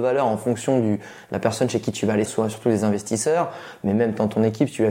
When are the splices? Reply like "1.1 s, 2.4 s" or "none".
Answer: 2.2 s